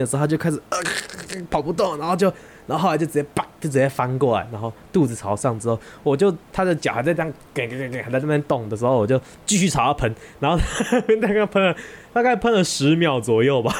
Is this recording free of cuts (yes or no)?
yes